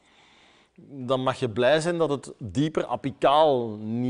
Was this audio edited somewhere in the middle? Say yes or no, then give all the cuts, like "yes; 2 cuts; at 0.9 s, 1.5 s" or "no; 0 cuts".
no; 0 cuts